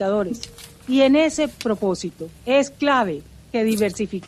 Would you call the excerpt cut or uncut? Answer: cut